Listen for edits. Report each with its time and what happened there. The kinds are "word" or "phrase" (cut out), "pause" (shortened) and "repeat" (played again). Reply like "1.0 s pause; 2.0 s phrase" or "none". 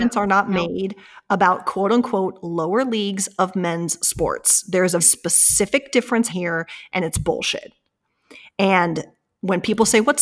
5.0 s word; 6.3 s word